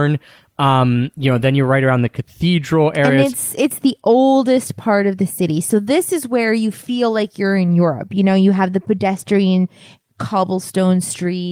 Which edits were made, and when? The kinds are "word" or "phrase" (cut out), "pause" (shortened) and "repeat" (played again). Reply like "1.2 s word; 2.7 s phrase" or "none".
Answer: none

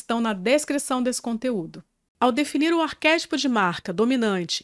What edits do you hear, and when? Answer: none

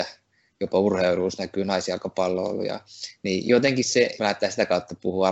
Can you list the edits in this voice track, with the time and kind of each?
4.2 s word

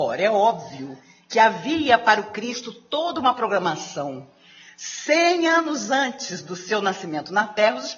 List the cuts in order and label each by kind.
none

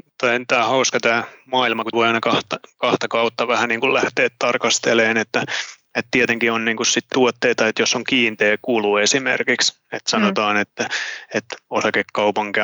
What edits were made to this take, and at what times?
1.9 s word; 7.1 s phrase

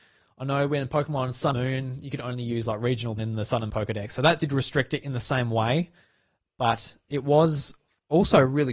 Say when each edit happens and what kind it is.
1.5 s word; 3.2 s word; 3.7 s word

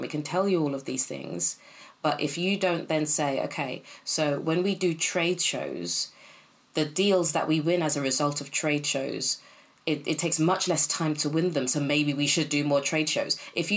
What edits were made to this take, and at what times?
none

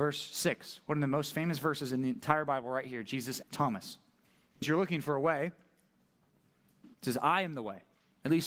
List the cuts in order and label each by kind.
3.4 s word; 4.2 s pause; 4.6 s word; 6.9 s pause

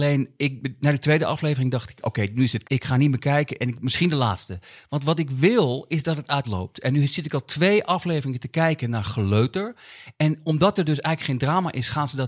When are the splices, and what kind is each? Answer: 2.6 s word; 6.4 s phrase

